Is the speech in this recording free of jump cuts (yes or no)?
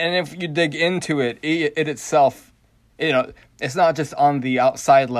yes